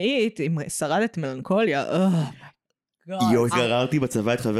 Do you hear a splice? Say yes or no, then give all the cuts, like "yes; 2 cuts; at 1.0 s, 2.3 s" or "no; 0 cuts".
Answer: yes; 2 cuts; at 1.1 s, 3.5 s